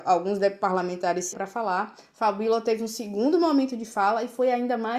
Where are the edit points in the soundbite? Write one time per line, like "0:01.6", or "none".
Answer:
0:01.3